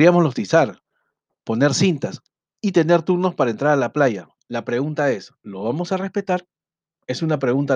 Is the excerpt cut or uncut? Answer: uncut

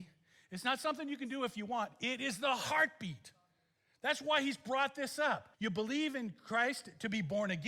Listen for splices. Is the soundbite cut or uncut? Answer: cut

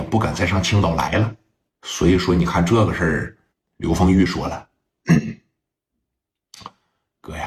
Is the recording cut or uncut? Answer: uncut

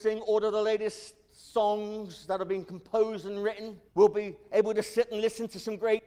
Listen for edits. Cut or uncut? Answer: cut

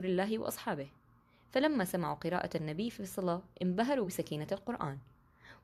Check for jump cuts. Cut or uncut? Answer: uncut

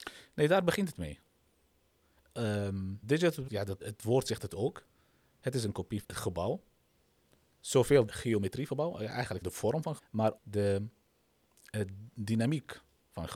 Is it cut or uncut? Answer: cut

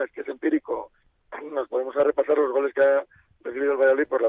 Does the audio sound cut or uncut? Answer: uncut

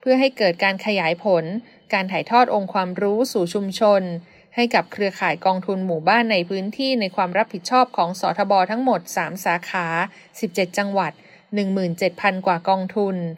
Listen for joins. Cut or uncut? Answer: uncut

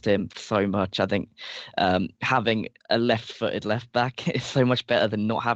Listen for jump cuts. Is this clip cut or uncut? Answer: cut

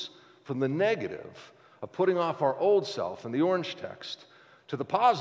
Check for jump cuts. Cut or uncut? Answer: uncut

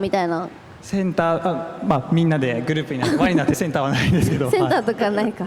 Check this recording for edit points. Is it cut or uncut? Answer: cut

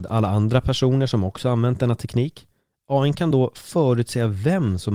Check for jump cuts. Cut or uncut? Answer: uncut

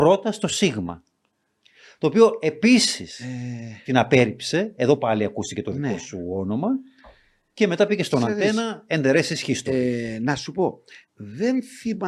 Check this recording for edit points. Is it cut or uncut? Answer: uncut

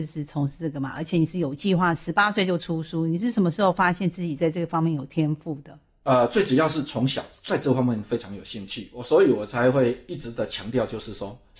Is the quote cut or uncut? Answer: uncut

